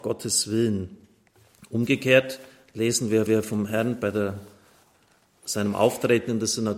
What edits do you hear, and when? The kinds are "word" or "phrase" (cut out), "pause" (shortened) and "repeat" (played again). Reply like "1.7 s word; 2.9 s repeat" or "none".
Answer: 3.3 s repeat